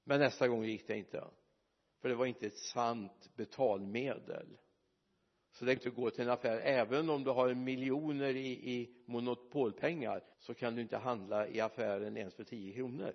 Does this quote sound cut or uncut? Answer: cut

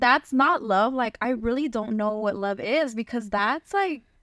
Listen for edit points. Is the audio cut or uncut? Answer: uncut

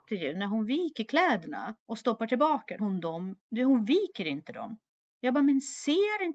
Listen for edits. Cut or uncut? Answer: cut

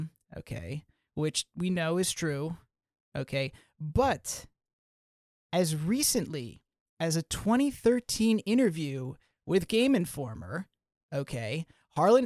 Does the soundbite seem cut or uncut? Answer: uncut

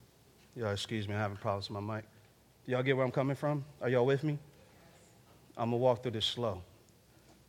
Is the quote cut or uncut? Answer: uncut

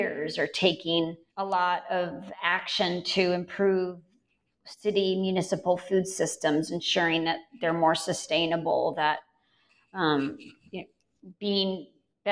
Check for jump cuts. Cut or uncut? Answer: cut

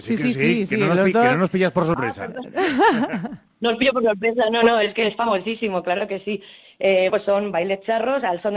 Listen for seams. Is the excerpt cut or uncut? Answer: cut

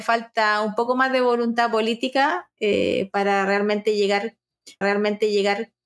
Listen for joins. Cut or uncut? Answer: cut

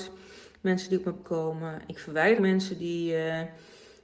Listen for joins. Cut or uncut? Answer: cut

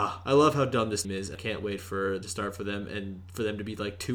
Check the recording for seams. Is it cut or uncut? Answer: cut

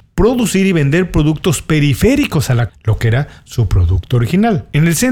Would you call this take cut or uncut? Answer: cut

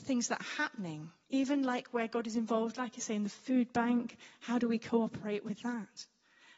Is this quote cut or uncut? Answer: uncut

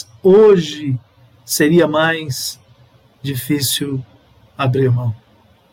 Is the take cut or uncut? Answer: uncut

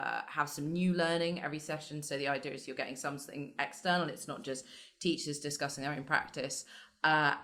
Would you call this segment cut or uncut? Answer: uncut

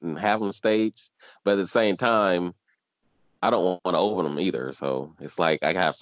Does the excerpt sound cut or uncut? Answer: uncut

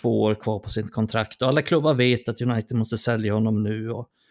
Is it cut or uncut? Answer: uncut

